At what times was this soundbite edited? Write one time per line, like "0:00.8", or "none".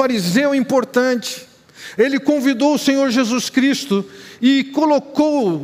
none